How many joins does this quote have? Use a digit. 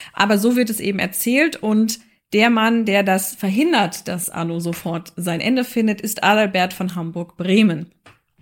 0